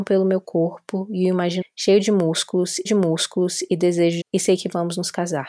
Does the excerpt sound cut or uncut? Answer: cut